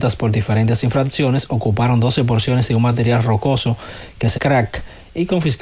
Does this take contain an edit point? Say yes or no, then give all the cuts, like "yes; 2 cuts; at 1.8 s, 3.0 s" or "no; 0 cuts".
yes; 1 cut; at 4.3 s